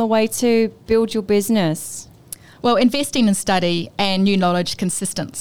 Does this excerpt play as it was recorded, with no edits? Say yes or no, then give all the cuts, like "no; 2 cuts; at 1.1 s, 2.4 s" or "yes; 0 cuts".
yes; 0 cuts